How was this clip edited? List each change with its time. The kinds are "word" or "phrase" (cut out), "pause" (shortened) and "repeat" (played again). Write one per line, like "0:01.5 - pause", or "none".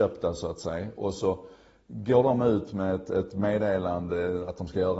none

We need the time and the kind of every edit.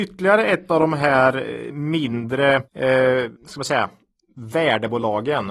0:02.7 - pause
0:03.4 - pause

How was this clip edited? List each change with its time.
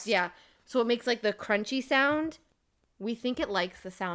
none

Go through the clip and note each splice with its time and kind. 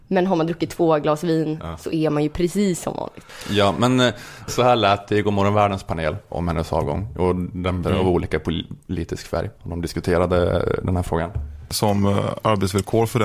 0:06.3 - word
0:07.8 - phrase
0:09.5 - pause

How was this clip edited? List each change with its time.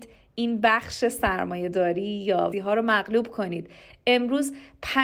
0:02.5 - word

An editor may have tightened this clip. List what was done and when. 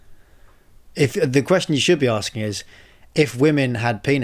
none

